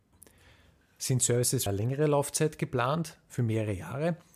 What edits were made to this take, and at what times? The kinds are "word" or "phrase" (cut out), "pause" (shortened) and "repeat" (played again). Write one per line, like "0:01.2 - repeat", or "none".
0:01.7 - word